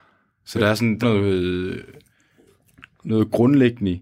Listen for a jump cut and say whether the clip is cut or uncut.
cut